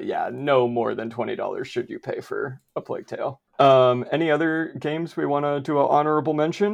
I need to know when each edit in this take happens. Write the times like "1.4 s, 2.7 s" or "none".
3.5 s